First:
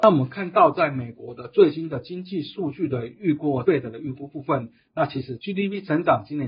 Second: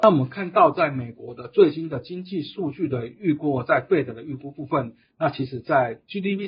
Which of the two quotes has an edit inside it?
first; 2 cuts; at 3.6 s, 5.4 s

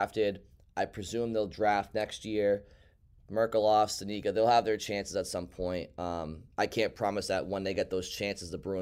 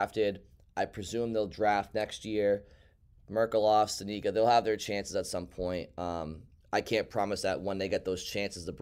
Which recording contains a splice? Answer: first; 1 cut; at 6.5 s

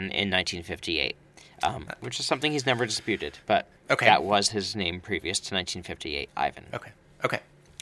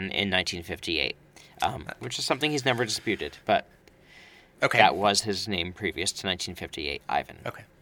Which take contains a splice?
first; 1 cut; at 3.8 s

